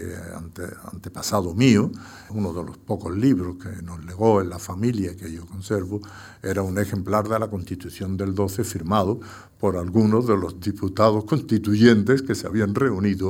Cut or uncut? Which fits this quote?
cut